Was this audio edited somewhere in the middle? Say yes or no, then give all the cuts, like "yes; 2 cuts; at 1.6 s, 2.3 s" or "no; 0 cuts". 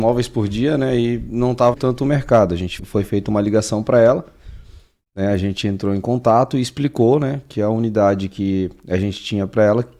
yes; 2 cuts; at 1.7 s, 2.8 s